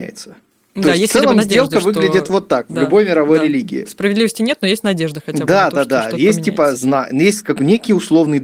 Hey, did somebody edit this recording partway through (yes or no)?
no